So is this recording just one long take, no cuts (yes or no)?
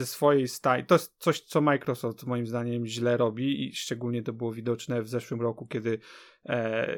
yes